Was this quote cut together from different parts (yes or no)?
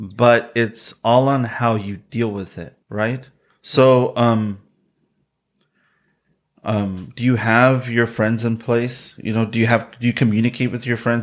yes